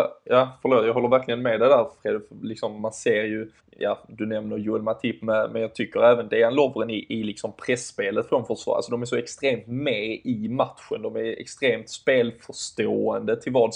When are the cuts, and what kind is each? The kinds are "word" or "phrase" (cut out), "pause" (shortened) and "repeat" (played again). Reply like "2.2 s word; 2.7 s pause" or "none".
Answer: 3.6 s pause

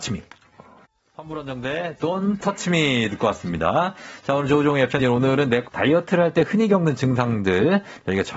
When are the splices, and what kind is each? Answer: 5.0 s word; 5.7 s phrase

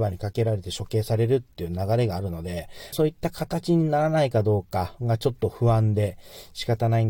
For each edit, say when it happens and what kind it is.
2.9 s phrase

